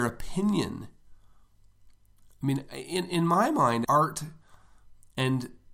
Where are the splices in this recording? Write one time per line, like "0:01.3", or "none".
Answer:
0:03.8